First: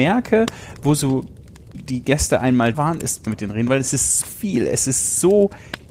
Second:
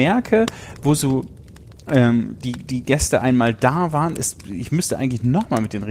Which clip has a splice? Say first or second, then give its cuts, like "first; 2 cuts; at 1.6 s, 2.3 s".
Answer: first; 4 cuts; at 1.7 s, 2.7 s, 3.3 s, 4.2 s